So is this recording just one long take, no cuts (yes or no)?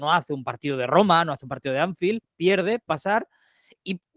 no